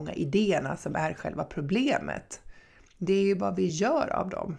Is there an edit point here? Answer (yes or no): no